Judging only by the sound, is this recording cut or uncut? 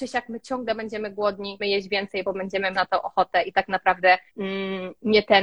cut